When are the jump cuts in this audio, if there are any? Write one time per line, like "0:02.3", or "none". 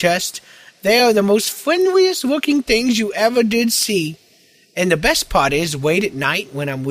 none